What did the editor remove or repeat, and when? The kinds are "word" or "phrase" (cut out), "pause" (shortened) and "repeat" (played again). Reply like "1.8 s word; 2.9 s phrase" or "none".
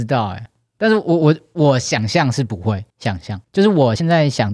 2.9 s pause

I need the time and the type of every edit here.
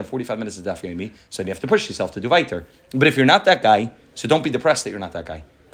none

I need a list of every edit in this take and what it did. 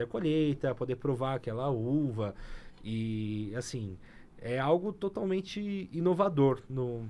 none

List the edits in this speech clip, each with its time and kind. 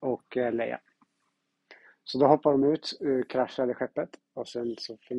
none

